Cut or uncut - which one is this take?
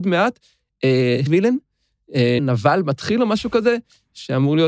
cut